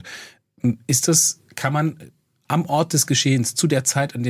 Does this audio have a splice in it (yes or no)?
yes